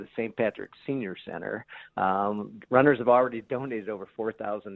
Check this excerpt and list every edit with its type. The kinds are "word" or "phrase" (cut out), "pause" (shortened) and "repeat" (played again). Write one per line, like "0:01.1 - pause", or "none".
none